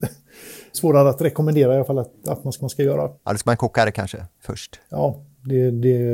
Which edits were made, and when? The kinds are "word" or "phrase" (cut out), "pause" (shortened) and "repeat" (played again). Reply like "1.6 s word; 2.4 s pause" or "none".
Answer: 2.6 s repeat